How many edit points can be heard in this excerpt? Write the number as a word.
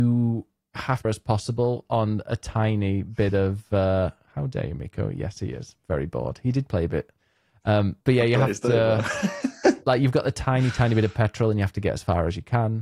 two